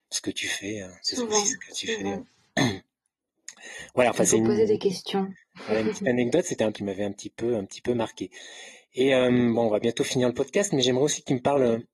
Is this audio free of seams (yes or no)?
no